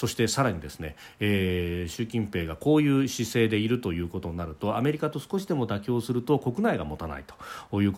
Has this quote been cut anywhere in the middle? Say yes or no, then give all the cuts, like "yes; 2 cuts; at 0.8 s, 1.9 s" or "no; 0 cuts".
no; 0 cuts